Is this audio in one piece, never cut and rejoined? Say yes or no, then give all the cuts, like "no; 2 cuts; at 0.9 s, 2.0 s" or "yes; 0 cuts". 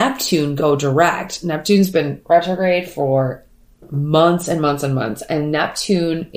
yes; 0 cuts